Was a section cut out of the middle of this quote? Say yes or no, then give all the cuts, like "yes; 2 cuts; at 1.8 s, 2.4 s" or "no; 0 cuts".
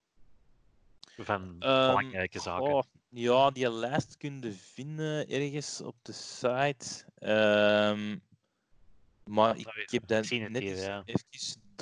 no; 0 cuts